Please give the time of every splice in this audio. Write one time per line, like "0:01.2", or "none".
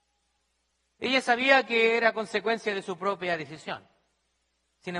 none